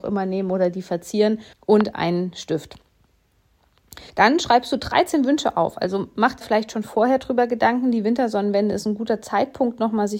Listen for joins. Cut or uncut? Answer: cut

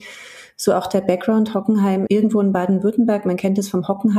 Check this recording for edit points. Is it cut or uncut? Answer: cut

